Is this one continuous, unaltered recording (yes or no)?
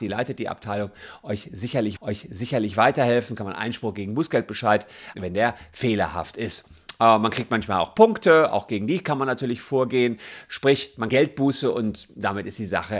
no